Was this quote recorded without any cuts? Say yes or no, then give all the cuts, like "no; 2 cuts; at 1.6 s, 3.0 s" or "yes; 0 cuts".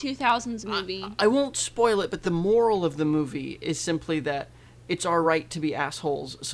yes; 0 cuts